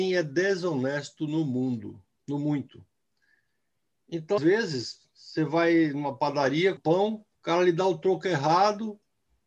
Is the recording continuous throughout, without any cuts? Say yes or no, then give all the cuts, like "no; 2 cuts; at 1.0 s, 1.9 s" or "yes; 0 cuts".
no; 3 cuts; at 4.4 s, 6.8 s, 7.3 s